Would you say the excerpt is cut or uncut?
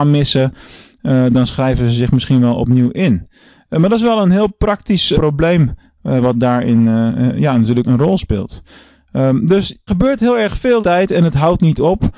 cut